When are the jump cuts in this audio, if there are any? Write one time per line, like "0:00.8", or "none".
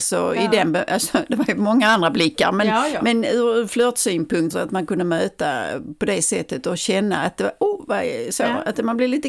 0:04.5